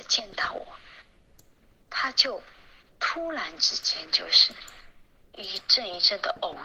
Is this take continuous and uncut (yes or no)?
yes